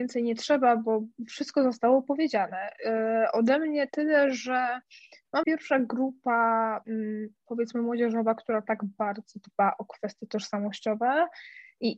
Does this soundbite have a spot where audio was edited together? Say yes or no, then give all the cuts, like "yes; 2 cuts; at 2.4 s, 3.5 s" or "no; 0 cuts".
yes; 1 cut; at 5.4 s